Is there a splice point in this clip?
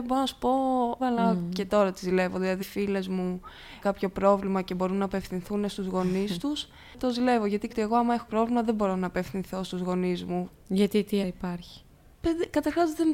yes; 6 cuts; at 1.0 s, 2.6 s, 3.8 s, 7.7 s, 8.3 s, 11.2 s

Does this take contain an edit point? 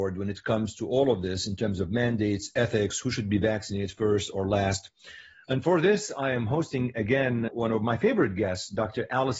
yes; 1 cut; at 7.5 s

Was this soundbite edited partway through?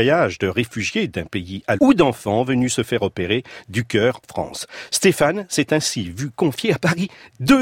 yes; 2 cuts; at 1.8 s, 4.2 s

